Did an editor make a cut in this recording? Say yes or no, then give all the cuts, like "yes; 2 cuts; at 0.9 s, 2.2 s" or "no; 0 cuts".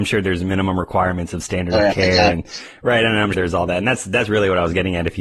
yes; 1 cut; at 3.3 s